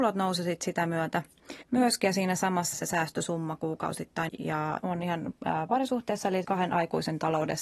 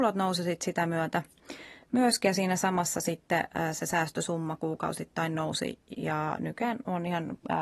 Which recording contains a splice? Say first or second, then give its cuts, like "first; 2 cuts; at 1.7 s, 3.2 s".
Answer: first; 5 cuts; at 1.6 s, 2.7 s, 4.3 s, 4.8 s, 6.4 s